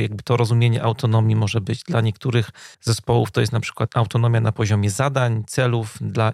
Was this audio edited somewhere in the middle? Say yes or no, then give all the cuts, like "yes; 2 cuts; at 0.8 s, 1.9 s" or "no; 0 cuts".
yes; 1 cut; at 2.7 s